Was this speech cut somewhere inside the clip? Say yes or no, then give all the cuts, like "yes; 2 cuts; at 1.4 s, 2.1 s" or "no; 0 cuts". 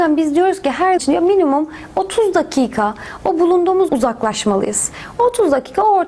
yes; 2 cuts; at 1.0 s, 3.9 s